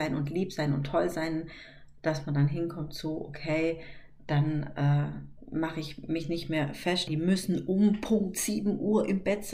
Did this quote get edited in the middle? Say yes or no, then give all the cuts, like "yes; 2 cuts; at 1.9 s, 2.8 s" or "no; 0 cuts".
yes; 1 cut; at 7.1 s